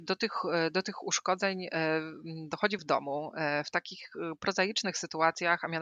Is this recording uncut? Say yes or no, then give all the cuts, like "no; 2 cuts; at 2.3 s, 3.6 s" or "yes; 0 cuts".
no; 1 cut; at 2.8 s